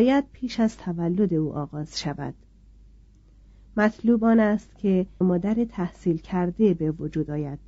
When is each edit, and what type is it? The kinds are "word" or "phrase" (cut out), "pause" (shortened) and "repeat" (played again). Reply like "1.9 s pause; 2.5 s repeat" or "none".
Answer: 5.2 s phrase

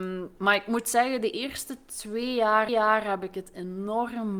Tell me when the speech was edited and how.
2.7 s repeat

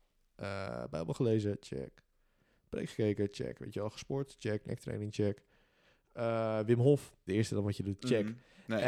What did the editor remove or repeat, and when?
7.3 s word

